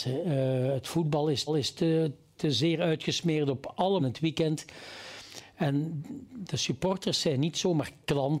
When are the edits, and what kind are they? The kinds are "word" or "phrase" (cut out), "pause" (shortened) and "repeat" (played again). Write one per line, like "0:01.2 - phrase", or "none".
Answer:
0:01.5 - repeat
0:04.0 - phrase